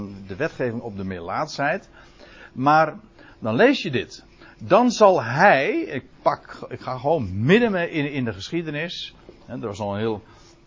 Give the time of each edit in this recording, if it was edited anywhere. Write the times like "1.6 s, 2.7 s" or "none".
none